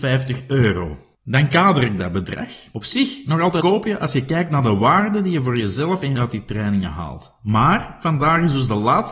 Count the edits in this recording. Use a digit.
2